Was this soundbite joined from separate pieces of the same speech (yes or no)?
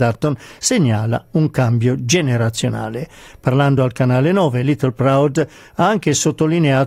no